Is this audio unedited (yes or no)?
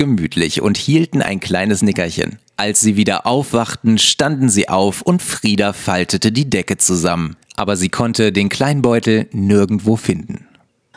no